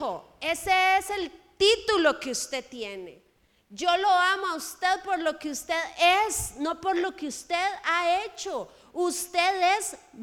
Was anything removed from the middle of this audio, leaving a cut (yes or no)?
no